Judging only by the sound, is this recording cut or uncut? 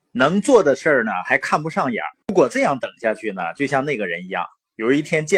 cut